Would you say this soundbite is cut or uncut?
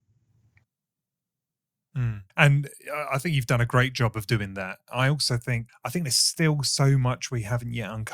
cut